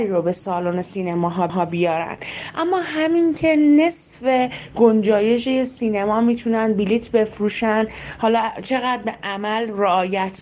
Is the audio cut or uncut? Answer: cut